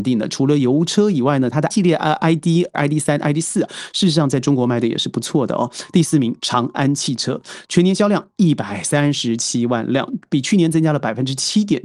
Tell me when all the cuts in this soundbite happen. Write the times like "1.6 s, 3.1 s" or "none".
1.7 s, 2.7 s